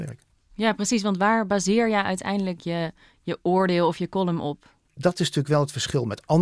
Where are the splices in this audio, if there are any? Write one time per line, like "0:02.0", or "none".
0:04.9